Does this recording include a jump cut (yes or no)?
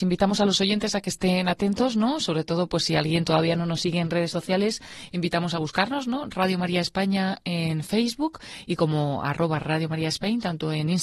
no